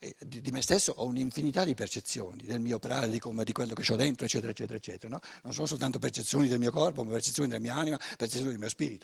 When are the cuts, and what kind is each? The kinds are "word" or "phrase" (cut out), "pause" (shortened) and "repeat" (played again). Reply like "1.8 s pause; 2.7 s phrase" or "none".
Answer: none